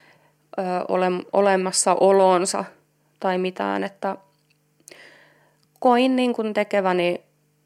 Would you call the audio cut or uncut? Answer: uncut